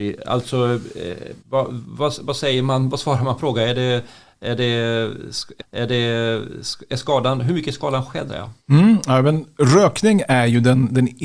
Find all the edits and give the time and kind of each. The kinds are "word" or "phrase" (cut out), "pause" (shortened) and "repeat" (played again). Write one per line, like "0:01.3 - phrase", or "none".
0:01.4 - pause
0:03.4 - phrase
0:05.6 - repeat
0:08.3 - phrase
0:08.6 - pause